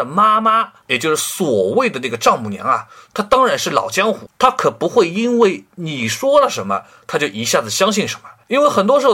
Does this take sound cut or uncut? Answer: uncut